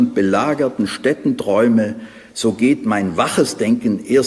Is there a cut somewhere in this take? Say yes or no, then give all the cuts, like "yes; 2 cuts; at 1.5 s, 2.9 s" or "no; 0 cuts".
no; 0 cuts